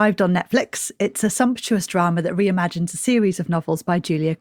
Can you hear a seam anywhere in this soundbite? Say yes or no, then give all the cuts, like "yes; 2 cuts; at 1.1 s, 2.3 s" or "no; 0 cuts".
no; 0 cuts